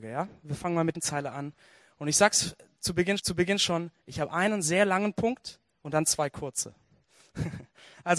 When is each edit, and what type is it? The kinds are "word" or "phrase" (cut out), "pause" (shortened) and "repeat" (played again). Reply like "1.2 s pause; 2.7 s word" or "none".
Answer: 0.9 s phrase; 3.2 s repeat